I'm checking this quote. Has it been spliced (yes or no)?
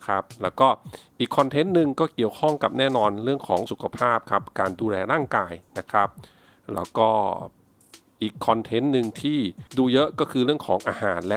yes